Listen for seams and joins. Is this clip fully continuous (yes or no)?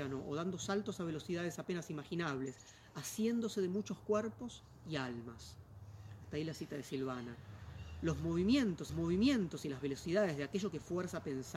no